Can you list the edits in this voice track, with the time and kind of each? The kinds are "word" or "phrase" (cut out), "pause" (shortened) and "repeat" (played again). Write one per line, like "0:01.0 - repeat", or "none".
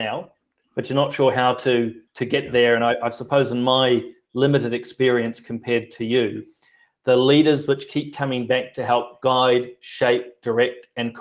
0:02.1 - pause